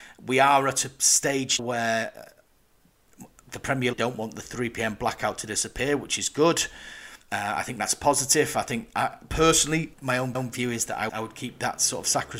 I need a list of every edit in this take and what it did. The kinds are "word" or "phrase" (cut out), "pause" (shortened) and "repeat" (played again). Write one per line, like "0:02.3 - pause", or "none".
0:01.6 - word
0:03.9 - phrase
0:07.2 - pause
0:09.9 - phrase
0:10.3 - repeat
0:11.1 - word